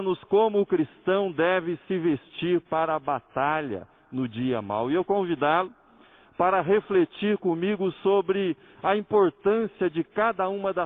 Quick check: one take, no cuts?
no; 1 cut; at 5.0 s

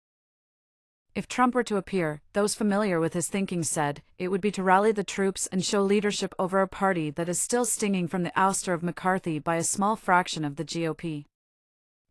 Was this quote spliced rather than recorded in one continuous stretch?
no; 0 cuts

